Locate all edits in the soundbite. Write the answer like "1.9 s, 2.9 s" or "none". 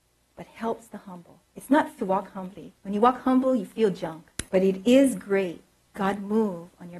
1.5 s, 2.0 s, 2.8 s, 4.5 s, 6.0 s